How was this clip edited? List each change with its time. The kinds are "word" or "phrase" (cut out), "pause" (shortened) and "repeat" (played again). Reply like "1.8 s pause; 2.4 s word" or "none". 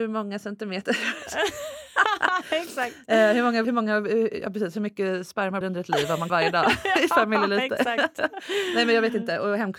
3.6 s word; 5.6 s word; 6.3 s word